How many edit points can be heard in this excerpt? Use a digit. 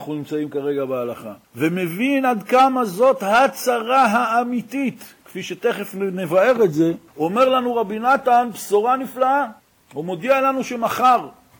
3